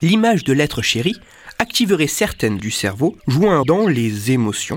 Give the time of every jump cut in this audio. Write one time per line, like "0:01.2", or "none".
0:02.6
0:03.2
0:03.6